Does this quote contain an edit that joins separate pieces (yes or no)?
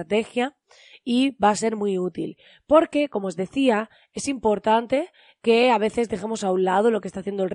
no